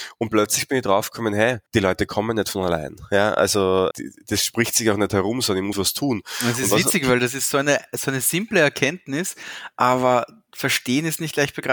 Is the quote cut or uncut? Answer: cut